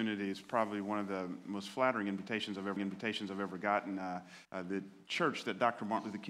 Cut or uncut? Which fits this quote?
cut